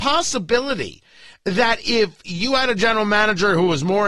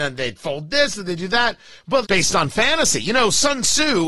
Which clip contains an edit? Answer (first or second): second